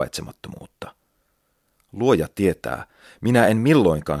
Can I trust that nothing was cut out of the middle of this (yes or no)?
yes